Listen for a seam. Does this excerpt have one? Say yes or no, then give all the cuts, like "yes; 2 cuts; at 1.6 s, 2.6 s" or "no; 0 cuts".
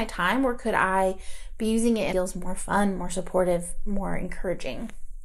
yes; 1 cut; at 2.1 s